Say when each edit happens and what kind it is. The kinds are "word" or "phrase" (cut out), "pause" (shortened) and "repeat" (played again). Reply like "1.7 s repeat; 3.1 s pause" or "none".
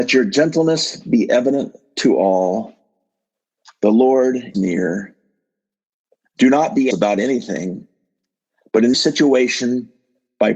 4.5 s word; 6.9 s word; 8.9 s word